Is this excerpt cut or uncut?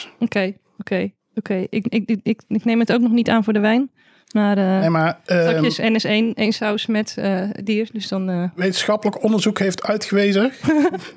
uncut